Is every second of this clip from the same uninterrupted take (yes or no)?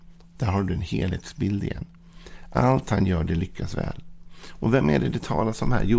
yes